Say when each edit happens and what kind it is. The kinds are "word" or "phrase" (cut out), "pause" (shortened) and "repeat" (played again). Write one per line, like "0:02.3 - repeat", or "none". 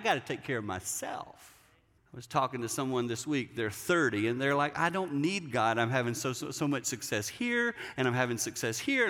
0:02.0 - pause

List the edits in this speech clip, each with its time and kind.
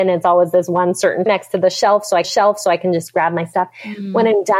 0:01.3 - word
0:02.2 - repeat

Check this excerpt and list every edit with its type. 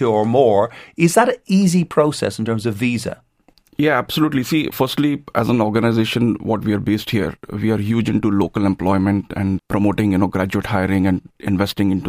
0:04.7 - word
0:09.6 - word

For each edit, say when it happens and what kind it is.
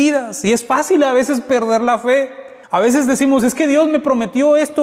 0:02.6 - pause

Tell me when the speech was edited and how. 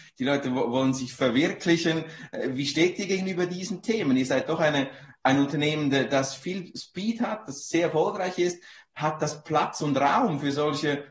none

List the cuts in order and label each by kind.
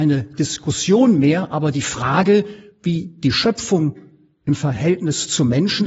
none

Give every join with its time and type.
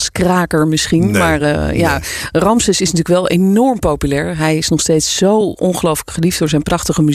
none

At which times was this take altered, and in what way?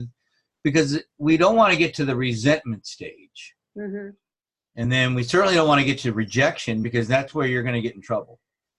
none

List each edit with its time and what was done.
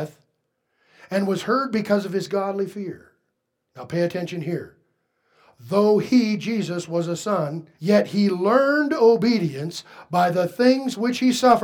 0:07.7 - pause

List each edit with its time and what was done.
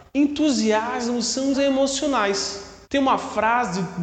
0:01.5 - word
0:02.8 - pause

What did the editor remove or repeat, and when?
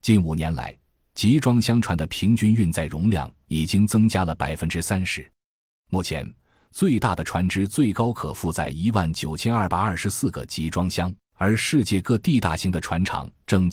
0:11.2 - pause

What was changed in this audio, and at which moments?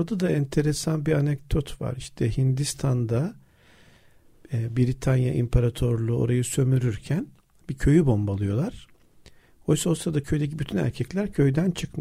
none

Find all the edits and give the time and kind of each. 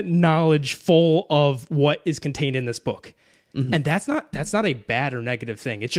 none

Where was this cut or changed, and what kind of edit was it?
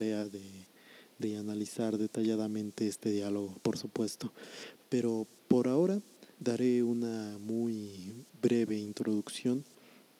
0:01.2 - word
0:06.3 - pause

